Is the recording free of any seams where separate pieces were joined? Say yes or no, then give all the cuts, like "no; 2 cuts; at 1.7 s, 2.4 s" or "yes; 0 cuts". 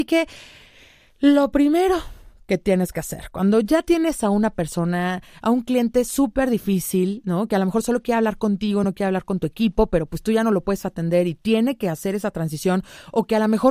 yes; 0 cuts